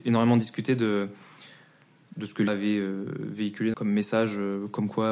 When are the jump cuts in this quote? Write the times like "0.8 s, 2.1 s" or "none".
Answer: 2.5 s, 3.7 s